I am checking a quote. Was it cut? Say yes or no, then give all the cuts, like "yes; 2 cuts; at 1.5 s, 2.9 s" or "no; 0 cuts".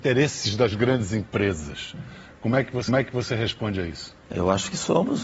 yes; 2 cuts; at 2.9 s, 4.2 s